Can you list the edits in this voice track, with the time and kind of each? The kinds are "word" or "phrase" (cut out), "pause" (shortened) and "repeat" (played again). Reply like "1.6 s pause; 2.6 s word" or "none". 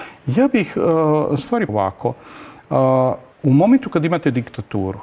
1.4 s word; 1.7 s word; 3.3 s pause